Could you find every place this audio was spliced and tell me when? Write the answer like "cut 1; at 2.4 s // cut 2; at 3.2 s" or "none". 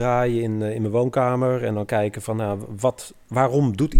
none